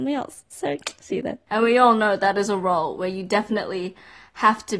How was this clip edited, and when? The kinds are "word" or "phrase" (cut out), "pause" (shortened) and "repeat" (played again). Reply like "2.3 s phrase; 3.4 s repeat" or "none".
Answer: none